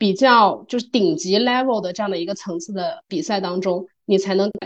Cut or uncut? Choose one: uncut